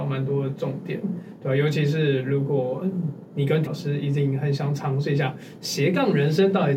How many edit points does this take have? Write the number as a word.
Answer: one